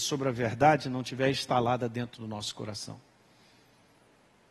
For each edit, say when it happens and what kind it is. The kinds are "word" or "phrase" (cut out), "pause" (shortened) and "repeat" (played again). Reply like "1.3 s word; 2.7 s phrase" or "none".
none